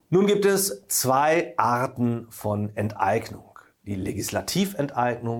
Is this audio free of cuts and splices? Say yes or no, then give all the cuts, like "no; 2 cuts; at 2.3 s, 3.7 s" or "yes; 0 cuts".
yes; 0 cuts